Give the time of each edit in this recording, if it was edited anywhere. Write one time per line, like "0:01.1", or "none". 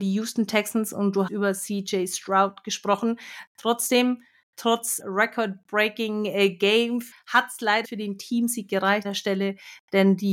0:01.3
0:05.0
0:07.1
0:07.8
0:09.0